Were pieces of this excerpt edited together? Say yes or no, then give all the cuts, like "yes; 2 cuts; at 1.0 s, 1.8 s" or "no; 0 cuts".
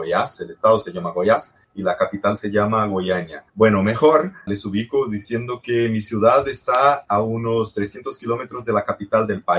yes; 3 cuts; at 1.6 s, 3.5 s, 4.5 s